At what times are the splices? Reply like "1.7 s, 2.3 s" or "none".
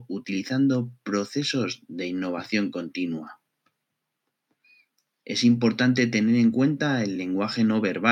none